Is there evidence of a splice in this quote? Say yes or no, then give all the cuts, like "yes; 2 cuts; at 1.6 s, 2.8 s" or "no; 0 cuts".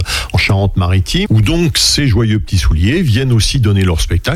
yes; 1 cut; at 1.3 s